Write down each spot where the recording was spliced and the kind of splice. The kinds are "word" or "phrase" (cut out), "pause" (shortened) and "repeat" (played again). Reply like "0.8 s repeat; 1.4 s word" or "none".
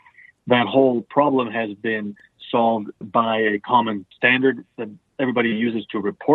3.0 s word; 4.1 s pause